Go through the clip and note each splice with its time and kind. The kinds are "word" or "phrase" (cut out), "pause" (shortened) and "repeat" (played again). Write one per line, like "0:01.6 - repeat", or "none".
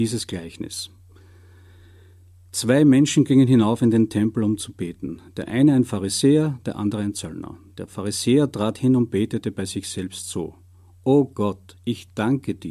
none